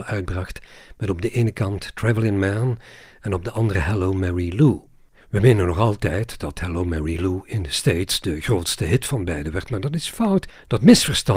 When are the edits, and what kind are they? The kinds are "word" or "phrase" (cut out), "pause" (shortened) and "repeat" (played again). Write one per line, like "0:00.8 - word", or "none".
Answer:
none